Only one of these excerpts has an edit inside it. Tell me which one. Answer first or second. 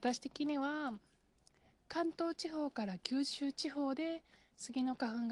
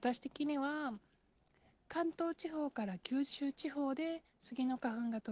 second